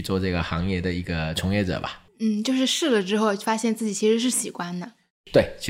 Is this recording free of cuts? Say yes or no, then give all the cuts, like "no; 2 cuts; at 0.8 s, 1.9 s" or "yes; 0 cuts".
no; 1 cut; at 2.1 s